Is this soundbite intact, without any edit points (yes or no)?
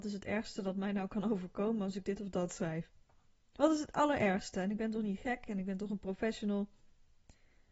yes